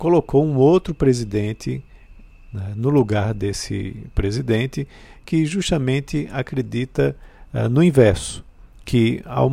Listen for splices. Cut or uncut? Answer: uncut